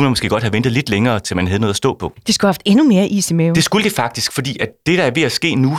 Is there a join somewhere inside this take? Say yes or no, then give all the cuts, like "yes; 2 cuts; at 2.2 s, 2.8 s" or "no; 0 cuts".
no; 0 cuts